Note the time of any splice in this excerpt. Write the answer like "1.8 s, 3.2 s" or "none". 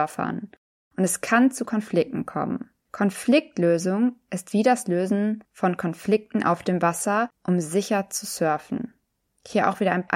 none